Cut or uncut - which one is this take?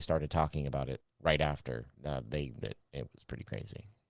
cut